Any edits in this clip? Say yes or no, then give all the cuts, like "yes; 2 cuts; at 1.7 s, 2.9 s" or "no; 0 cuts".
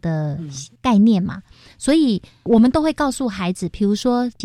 no; 0 cuts